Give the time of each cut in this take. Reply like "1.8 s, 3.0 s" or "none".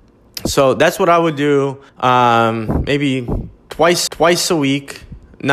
1.9 s, 4.1 s

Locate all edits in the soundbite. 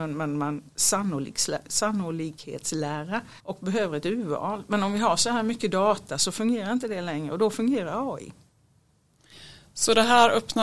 3.4 s

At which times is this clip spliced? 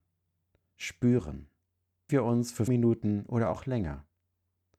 2.1 s, 2.7 s

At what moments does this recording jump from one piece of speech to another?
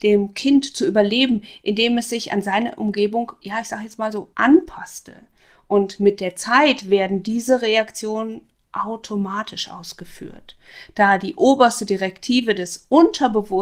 4.3 s

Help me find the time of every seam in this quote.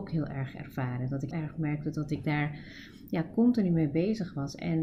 1.3 s

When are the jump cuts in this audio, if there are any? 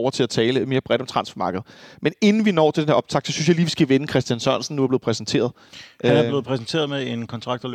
none

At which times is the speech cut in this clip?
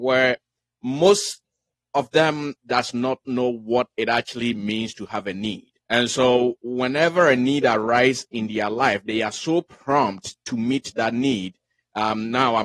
3.9 s, 5.8 s

